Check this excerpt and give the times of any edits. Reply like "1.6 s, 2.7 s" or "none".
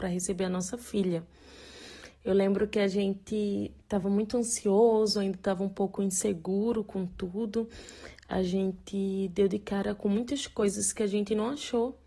none